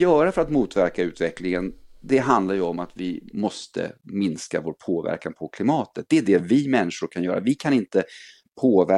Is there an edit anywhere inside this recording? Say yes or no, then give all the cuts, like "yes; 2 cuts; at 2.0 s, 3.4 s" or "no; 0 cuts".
no; 0 cuts